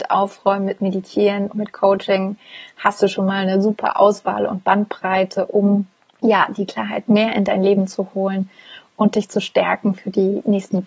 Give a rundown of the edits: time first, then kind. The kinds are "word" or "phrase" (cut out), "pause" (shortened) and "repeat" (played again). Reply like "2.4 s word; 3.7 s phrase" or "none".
1.5 s word; 6.0 s pause